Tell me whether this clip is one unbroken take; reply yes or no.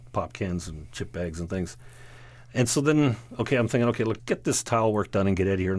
no